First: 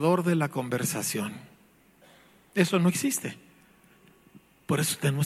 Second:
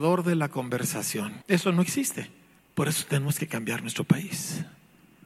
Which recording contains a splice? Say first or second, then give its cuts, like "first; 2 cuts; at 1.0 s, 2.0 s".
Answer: second; 2 cuts; at 1.4 s, 2.6 s